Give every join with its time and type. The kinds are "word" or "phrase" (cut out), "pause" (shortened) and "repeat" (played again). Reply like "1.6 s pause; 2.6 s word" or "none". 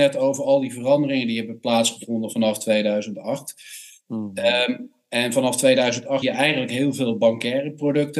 6.2 s word